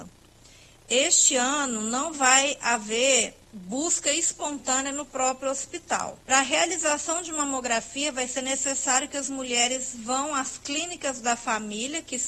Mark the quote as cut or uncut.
cut